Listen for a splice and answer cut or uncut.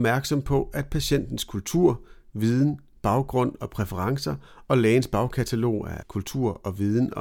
cut